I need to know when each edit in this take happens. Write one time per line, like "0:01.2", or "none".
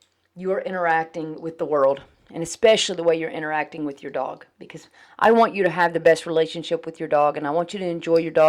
none